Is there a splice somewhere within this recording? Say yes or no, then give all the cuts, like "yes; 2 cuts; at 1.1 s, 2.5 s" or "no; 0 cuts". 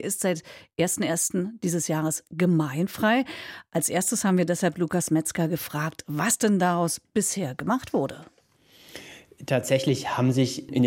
no; 0 cuts